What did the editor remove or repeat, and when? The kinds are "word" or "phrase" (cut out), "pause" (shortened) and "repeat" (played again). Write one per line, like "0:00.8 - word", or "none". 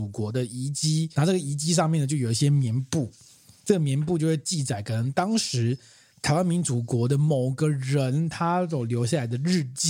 0:01.1 - word